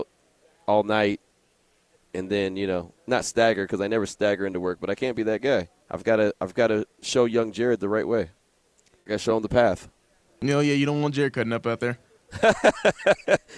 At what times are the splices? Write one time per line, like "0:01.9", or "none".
0:03.0
0:05.8
0:06.9
0:10.2